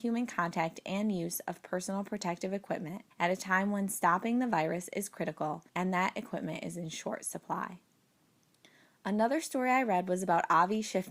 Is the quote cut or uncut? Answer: cut